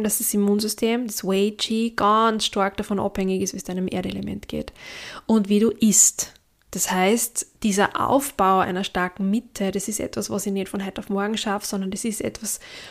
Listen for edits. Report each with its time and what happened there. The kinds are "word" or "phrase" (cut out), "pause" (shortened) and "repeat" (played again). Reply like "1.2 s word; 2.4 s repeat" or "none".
7.5 s pause